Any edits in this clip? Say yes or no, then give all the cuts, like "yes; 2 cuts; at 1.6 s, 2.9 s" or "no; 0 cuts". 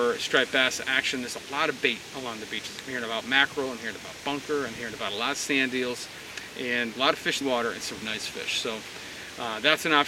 yes; 3 cuts; at 6.9 s, 7.4 s, 8.0 s